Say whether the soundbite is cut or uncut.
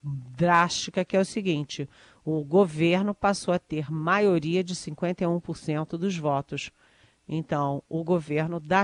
uncut